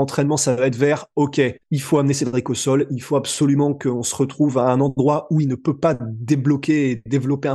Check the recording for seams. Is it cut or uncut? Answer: cut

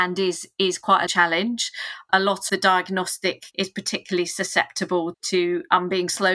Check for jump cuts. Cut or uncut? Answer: cut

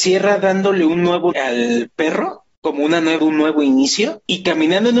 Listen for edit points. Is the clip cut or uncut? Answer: cut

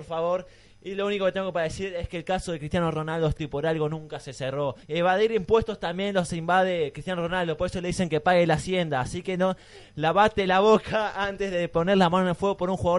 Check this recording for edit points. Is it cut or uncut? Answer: cut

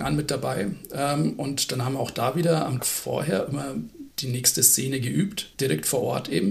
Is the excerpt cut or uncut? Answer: cut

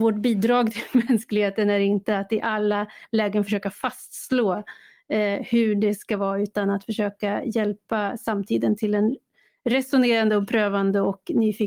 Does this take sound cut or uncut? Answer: uncut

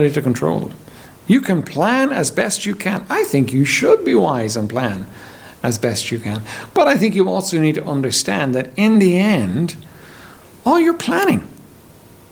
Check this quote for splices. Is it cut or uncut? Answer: uncut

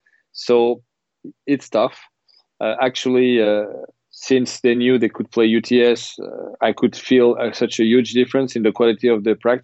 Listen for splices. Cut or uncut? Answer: uncut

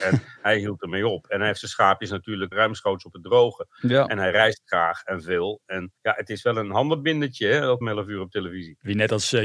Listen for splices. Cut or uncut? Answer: cut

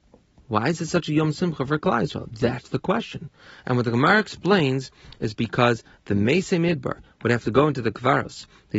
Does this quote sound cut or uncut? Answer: uncut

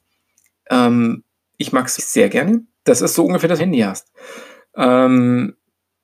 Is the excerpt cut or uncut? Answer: cut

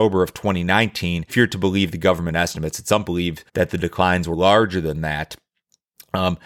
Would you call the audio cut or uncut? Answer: cut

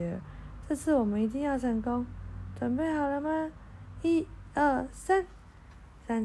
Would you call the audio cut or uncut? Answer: uncut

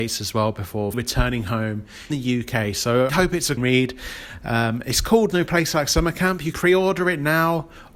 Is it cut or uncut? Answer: cut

